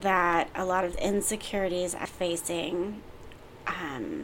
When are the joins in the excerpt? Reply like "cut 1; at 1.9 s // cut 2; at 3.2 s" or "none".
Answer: cut 1; at 0.9 s // cut 2; at 2.1 s